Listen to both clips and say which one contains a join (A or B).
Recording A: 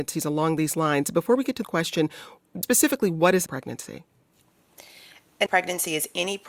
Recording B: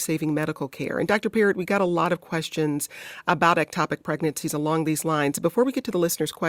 A